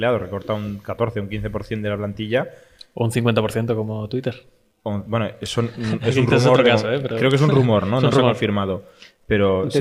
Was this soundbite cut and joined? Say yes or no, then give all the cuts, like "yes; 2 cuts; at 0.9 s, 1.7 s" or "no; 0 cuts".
no; 0 cuts